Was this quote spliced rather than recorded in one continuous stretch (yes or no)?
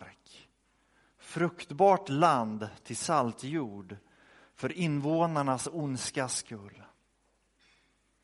no